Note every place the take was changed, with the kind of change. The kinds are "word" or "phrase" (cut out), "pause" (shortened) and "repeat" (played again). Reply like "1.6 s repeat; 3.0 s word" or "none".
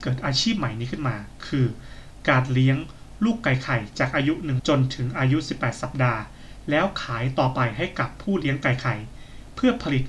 4.6 s phrase

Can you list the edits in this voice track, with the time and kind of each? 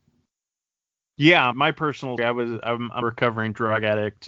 1.5 s word; 2.2 s word; 3.0 s word

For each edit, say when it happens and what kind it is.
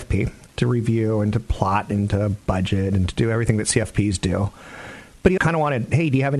5.4 s word

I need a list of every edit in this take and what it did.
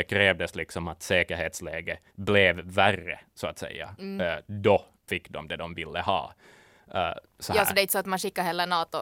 2.1 s pause

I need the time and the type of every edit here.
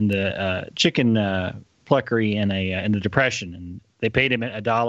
none

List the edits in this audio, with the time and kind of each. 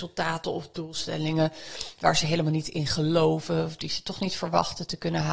none

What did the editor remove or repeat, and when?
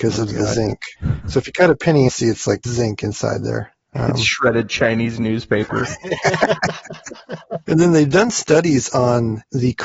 2.1 s phrase; 2.6 s word

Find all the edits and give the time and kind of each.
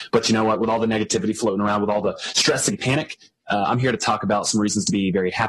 2.7 s word

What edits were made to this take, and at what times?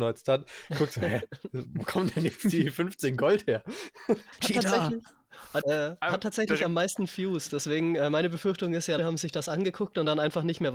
5.6 s word; 9.0 s word

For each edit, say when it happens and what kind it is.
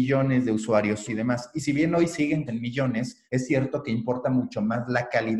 1.1 s word; 2.5 s phrase; 3.3 s pause

